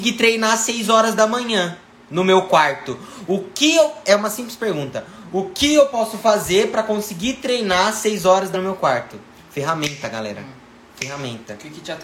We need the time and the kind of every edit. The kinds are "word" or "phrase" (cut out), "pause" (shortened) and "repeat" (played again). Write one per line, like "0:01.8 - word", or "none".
0:08.5 - word